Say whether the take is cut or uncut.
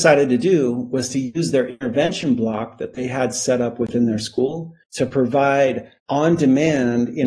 cut